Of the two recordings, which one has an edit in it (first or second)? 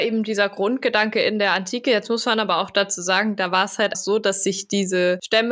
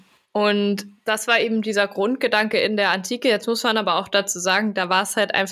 first